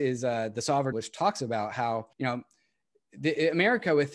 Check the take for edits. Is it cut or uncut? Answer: cut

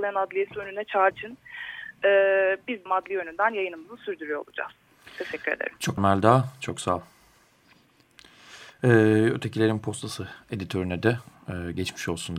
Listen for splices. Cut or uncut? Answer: cut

